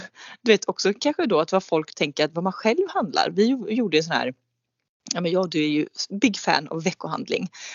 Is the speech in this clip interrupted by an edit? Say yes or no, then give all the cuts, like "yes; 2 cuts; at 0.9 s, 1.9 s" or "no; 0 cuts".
no; 0 cuts